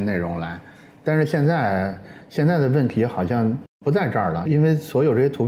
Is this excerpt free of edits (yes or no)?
no